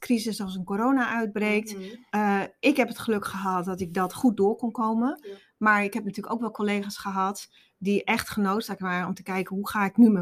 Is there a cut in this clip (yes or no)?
yes